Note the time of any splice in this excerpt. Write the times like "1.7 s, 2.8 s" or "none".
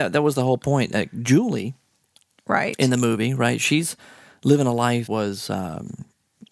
5.1 s